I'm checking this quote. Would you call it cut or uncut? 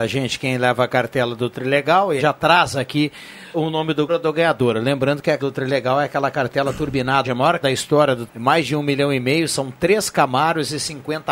cut